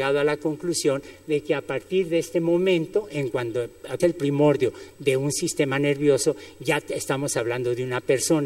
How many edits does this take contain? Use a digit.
1